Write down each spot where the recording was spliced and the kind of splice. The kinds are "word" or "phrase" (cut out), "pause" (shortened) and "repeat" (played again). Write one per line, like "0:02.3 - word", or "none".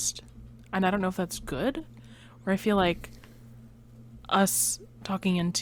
none

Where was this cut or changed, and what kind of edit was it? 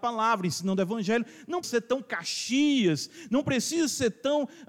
0:01.6 - word

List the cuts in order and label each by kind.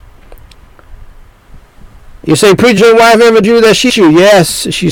0:02.8 - word
0:03.4 - word
0:03.9 - word

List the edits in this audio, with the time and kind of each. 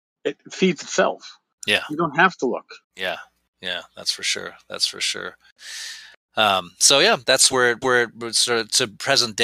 0:02.8 - pause
0:07.8 - repeat

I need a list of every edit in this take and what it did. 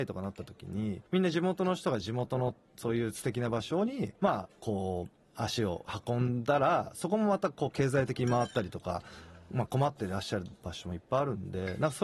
0:01.1 - pause
0:04.2 - pause
0:05.2 - pause

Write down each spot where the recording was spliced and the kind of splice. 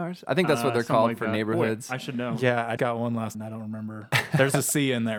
0:02.8 - word
0:03.3 - word

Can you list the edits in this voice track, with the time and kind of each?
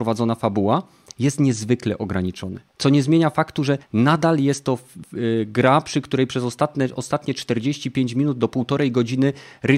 0:02.7 - pause
0:03.8 - pause

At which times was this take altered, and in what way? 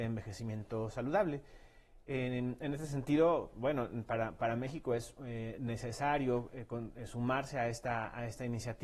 none

